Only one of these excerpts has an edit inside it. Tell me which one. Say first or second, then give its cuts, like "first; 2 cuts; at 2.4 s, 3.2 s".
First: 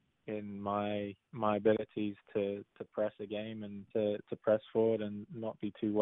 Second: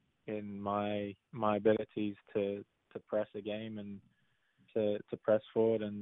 first; 2 cuts; at 2.7 s, 3.9 s